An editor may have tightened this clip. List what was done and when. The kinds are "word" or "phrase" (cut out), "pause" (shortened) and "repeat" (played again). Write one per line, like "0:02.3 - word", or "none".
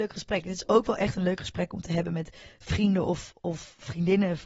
none